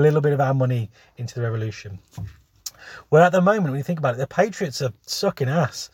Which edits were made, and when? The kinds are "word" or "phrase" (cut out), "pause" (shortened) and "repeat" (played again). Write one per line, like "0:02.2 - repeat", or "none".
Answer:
none